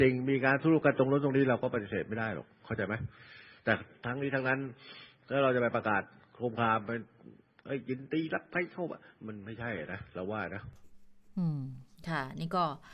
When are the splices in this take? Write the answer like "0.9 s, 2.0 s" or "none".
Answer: none